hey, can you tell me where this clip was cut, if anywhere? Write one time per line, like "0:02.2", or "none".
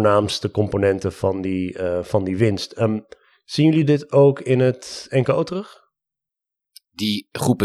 none